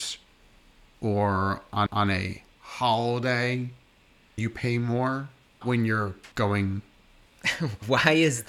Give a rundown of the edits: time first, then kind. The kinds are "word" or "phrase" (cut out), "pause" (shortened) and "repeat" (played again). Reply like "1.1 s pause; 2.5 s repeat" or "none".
1.9 s repeat; 4.4 s word; 5.6 s phrase; 6.3 s pause